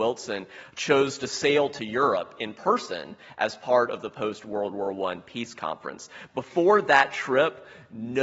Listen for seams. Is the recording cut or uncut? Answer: uncut